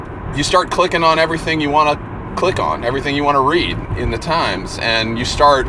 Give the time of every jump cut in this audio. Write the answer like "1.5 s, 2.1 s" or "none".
none